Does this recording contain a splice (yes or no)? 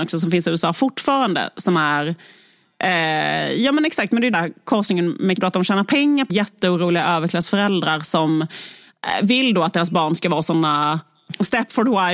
yes